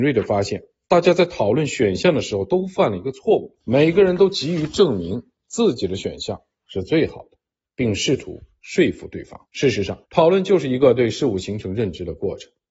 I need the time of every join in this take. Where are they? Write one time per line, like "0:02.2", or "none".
0:03.6
0:09.5
0:10.0

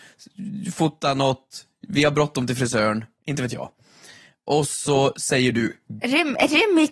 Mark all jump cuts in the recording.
none

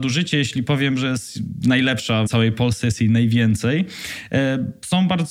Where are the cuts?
0:02.3

